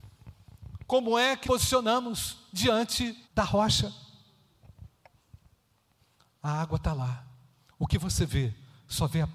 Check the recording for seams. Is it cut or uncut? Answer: cut